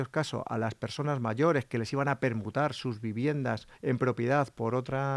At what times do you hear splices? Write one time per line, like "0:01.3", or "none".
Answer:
0:03.7